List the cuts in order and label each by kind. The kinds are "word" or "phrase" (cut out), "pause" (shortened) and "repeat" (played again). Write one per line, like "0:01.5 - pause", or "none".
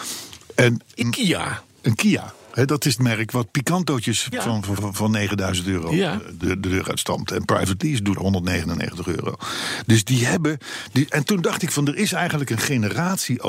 0:01.0 - word
0:03.0 - word
0:04.3 - word
0:04.8 - word
0:06.4 - word
0:08.2 - word